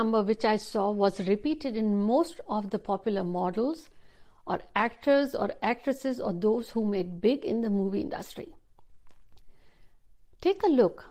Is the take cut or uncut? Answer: uncut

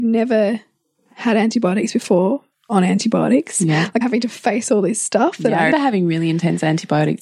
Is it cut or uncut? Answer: cut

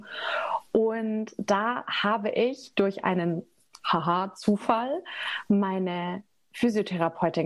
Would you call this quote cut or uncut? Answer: uncut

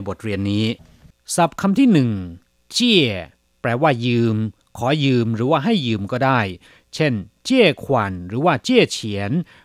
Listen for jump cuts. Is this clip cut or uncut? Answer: uncut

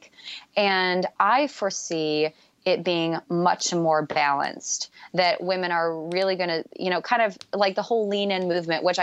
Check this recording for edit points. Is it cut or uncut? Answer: uncut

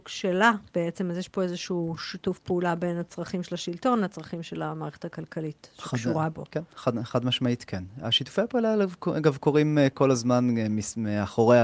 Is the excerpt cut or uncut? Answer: uncut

